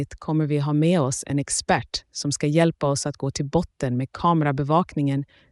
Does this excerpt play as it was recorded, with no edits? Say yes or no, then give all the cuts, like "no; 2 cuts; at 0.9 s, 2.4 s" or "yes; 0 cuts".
yes; 0 cuts